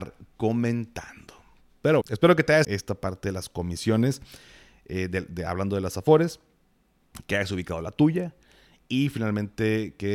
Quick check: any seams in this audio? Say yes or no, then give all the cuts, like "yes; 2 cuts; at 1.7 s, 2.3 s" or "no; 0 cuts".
yes; 2 cuts; at 2.0 s, 2.6 s